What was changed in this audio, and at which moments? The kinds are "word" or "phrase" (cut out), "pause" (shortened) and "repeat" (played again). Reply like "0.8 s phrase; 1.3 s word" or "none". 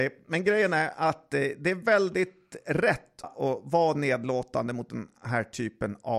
3.2 s word

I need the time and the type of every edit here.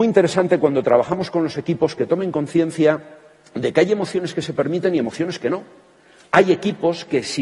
none

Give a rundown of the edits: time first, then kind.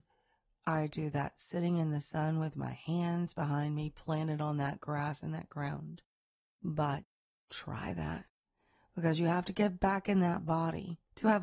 none

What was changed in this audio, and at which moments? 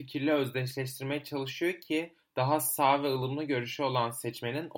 none

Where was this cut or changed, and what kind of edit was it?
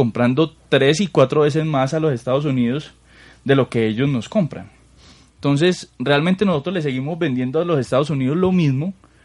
none

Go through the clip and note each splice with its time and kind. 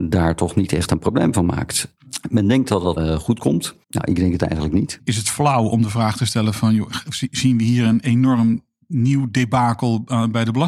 3.0 s word; 3.8 s pause

